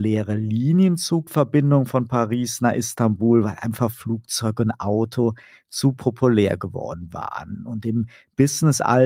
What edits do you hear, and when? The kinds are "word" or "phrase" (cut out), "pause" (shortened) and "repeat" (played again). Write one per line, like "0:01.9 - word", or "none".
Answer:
none